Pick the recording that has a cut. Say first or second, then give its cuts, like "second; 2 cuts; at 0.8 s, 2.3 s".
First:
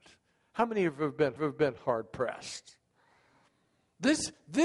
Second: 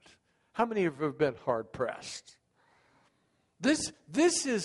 first; 1 cut; at 1.4 s